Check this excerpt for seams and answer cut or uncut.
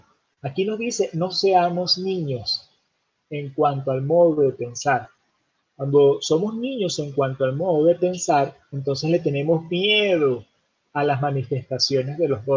uncut